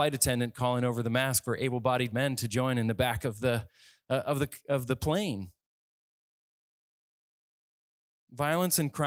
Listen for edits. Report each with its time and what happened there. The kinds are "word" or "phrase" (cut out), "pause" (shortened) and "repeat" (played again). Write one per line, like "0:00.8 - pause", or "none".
none